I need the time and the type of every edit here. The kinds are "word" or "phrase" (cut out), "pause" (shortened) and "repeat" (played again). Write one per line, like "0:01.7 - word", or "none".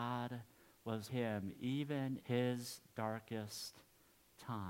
0:01.1 - word
0:02.2 - word